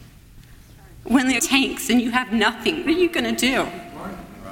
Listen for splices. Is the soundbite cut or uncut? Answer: cut